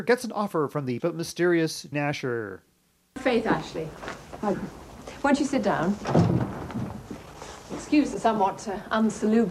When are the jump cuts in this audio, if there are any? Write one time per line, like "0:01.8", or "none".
0:01.0
0:01.9
0:04.5